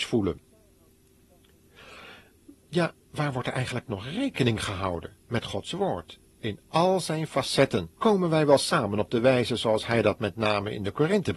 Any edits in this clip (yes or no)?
yes